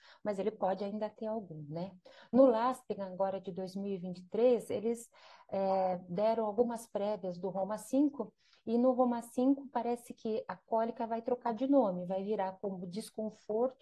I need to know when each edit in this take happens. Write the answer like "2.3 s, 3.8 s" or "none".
none